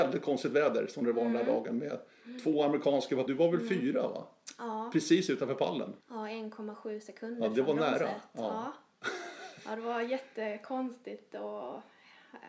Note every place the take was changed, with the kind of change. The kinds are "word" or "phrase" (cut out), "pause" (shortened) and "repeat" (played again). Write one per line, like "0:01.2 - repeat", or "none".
0:03.3 - phrase
0:06.0 - pause